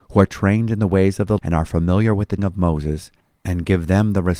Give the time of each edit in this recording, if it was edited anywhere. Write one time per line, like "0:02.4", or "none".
0:01.4
0:02.4